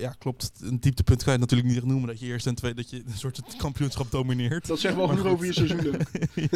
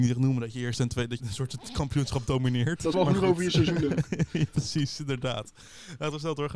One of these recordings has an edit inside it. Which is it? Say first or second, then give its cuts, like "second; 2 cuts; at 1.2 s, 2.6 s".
second; 3 cuts; at 1.2 s, 2.9 s, 4.5 s